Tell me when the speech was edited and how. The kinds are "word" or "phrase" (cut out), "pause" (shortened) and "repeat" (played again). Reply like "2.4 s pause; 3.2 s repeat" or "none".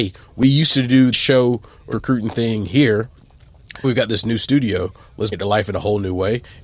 1.1 s word; 1.9 s word; 3.8 s word; 5.3 s word

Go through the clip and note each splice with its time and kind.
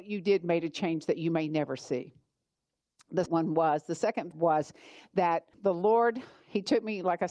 3.3 s word; 4.3 s phrase; 5.5 s word

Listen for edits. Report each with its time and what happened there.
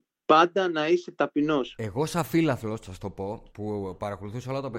3.5 s pause

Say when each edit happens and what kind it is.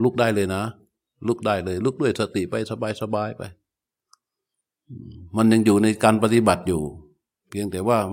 none

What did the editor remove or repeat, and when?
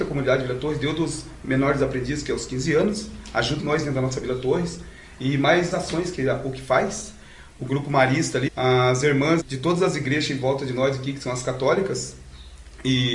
3.6 s word; 5.7 s word; 8.5 s word; 9.4 s word

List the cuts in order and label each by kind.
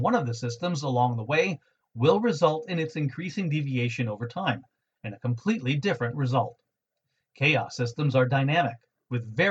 none

